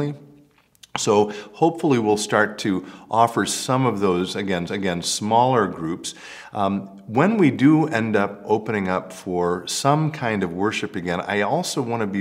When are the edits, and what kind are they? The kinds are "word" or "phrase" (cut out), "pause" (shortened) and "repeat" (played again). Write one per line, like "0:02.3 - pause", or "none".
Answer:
0:04.7 - repeat